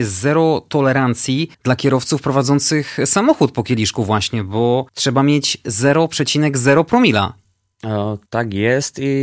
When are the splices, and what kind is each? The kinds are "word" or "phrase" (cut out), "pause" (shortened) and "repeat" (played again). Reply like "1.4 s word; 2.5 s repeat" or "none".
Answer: 1.5 s pause; 4.9 s pause; 8.3 s pause